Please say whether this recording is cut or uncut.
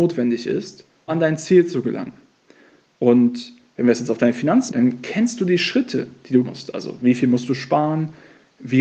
cut